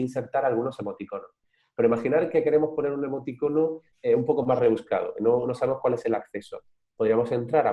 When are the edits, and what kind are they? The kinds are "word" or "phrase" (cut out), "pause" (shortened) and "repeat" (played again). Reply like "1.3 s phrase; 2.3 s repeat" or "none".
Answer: none